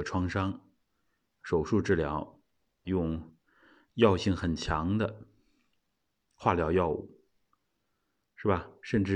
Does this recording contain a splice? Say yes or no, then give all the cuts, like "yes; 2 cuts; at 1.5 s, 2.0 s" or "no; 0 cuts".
yes; 1 cut; at 2.8 s